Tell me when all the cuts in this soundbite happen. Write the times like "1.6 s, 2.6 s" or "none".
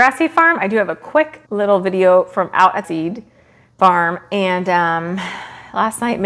1.4 s, 2.8 s